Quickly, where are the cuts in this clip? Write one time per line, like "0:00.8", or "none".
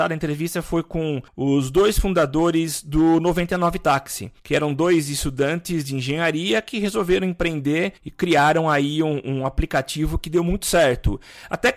0:01.3
0:04.4
0:08.0

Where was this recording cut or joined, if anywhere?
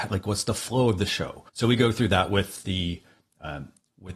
0:01.5

